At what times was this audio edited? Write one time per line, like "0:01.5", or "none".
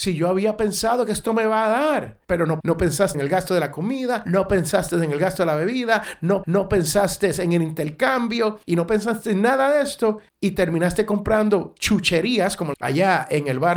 0:02.6
0:03.1
0:06.4
0:08.6
0:10.3
0:12.7